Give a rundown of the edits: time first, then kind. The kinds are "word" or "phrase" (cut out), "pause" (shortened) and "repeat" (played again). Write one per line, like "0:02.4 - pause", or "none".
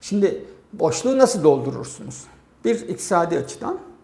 none